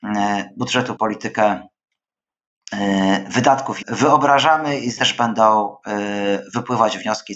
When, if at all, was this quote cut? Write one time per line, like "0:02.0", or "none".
0:01.0
0:03.8
0:05.0